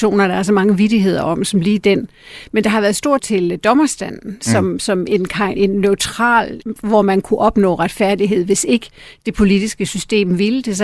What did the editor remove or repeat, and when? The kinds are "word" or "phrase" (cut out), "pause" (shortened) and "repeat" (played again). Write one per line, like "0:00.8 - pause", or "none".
0:03.2 - word
0:05.5 - word
0:06.6 - word